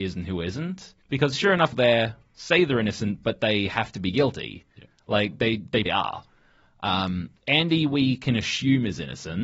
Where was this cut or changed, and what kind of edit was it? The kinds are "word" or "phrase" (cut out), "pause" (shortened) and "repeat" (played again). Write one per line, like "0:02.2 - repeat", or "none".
0:01.0 - pause
0:01.7 - phrase
0:04.7 - pause
0:05.9 - word
0:07.4 - pause

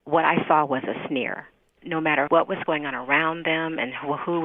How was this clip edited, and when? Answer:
0:01.8 - phrase
0:02.3 - word

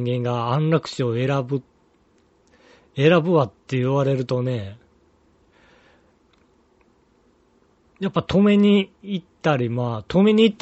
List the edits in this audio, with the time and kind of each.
0:03.6 - pause

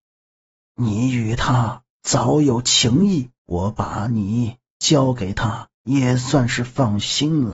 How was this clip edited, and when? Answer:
0:03.4 - pause
0:05.7 - pause

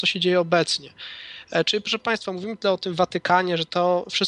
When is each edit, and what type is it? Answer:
none

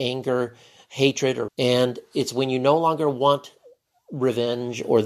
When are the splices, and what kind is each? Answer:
0:01.5 - word

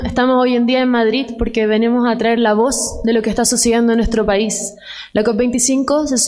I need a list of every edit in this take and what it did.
none

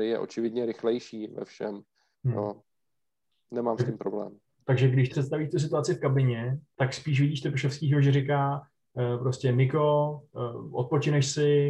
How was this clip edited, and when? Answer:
0:05.1 - word
0:06.7 - word

